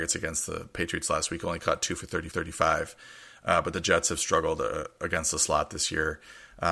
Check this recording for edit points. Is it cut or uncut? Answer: cut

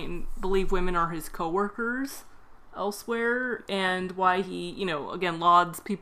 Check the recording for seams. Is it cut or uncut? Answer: uncut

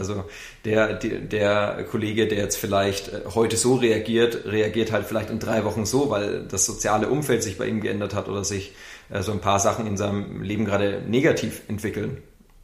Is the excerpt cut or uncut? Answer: uncut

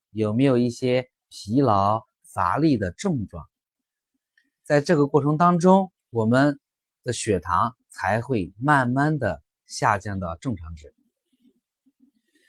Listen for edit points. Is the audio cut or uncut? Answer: cut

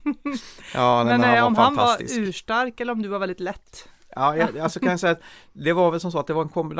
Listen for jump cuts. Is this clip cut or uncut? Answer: uncut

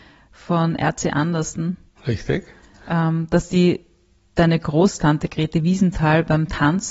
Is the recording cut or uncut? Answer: uncut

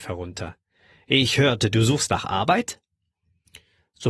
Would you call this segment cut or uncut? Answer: uncut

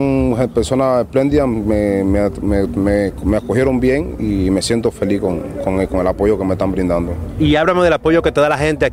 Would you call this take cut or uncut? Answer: uncut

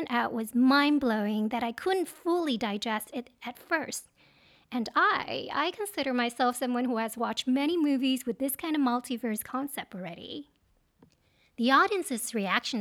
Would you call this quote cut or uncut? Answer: uncut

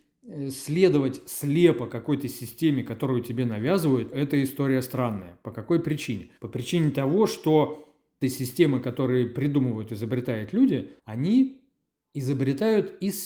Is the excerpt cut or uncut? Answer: cut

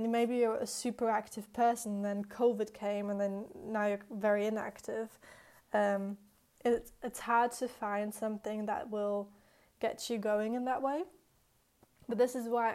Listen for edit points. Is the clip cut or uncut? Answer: uncut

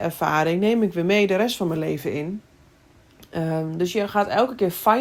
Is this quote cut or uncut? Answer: uncut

